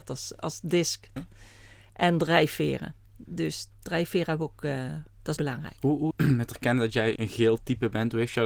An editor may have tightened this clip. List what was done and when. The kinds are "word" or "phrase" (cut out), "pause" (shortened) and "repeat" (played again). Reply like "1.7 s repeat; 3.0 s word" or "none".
1.2 s word; 5.4 s word; 6.1 s word; 7.2 s word